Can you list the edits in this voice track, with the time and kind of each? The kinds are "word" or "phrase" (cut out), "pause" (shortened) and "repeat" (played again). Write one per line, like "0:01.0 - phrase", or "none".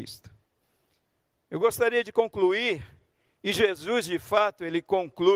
none